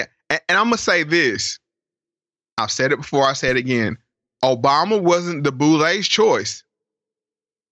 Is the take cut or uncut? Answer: uncut